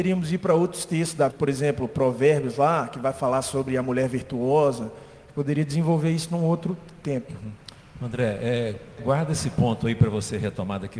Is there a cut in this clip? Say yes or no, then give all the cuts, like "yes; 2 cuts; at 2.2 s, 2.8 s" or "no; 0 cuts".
yes; 2 cuts; at 1.3 s, 9.0 s